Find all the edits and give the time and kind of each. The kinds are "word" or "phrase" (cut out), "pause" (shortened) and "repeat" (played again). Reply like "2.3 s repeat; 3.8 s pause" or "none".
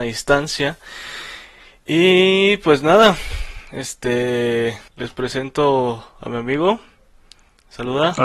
4.9 s pause